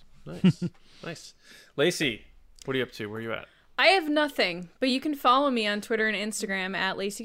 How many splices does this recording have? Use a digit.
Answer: 0